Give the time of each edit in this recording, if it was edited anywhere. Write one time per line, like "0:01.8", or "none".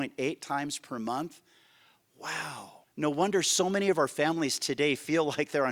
0:02.8